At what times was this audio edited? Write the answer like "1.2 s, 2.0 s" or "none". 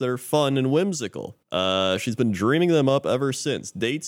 1.4 s